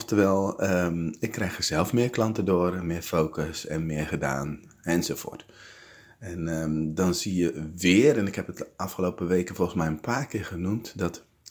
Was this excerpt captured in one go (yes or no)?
yes